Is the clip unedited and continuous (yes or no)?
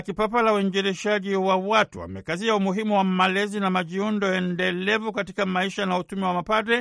yes